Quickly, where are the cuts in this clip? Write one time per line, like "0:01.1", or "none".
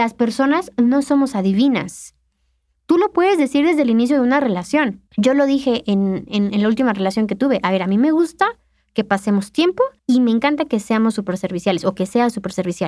0:05.1
0:10.0